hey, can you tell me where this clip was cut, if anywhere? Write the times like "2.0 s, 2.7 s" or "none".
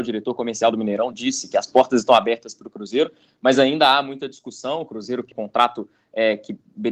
5.3 s